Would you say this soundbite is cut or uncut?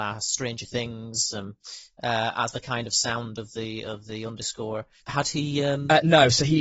cut